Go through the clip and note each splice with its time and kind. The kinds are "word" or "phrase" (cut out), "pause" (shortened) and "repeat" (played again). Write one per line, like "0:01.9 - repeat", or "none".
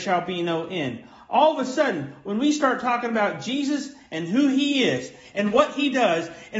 none